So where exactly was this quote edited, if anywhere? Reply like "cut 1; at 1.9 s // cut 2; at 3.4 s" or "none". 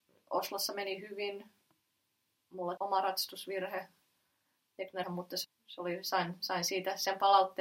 cut 1; at 2.8 s // cut 2; at 5.0 s // cut 3; at 5.4 s